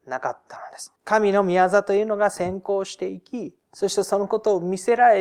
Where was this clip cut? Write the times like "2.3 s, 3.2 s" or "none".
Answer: 1.0 s, 3.6 s